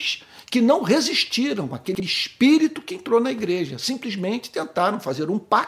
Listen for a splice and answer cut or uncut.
uncut